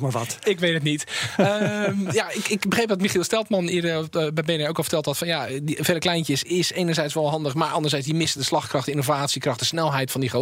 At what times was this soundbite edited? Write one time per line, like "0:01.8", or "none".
none